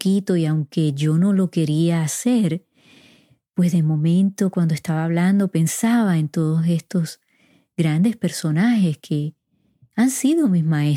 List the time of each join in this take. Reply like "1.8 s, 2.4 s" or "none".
none